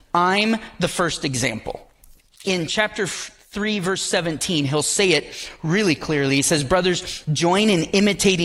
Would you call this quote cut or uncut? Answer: uncut